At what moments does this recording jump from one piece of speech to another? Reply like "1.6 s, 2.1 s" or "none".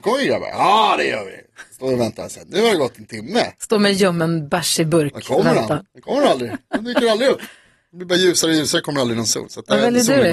none